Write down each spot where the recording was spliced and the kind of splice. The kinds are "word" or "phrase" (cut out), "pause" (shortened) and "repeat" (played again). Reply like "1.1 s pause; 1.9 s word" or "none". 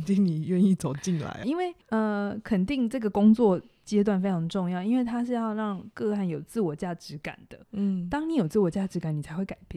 1.4 s word; 1.8 s pause; 7.6 s pause

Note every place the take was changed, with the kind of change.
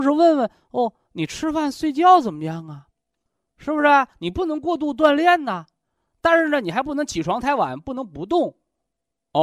none

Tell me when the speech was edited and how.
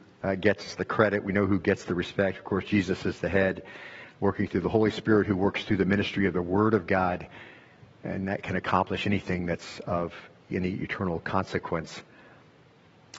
none

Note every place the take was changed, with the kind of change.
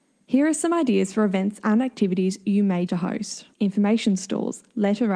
2.9 s word; 3.5 s pause

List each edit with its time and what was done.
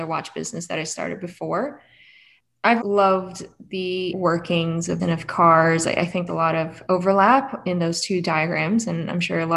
2.8 s word; 4.1 s word; 5.0 s word; 6.3 s word; 6.8 s word

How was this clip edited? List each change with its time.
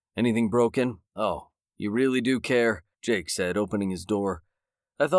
1.1 s pause; 2.9 s pause

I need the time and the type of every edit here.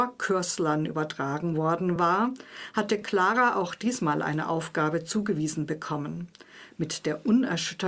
none

